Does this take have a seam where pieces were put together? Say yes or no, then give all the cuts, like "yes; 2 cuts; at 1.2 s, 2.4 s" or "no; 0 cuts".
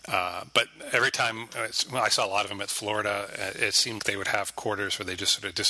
yes; 2 cuts; at 2.7 s, 4.0 s